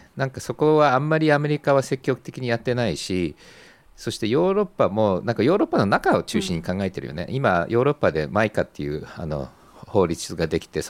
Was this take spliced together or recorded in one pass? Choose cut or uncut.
uncut